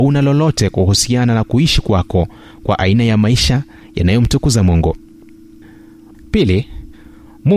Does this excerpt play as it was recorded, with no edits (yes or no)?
yes